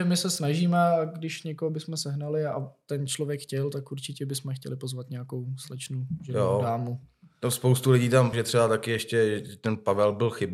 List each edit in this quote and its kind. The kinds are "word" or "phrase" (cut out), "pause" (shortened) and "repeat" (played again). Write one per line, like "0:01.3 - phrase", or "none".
0:08.3 - word